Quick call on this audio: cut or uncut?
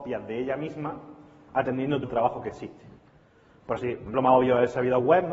cut